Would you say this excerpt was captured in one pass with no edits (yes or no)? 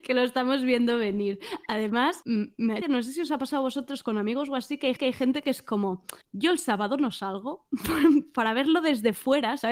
no